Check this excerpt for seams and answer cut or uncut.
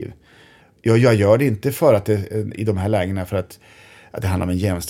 uncut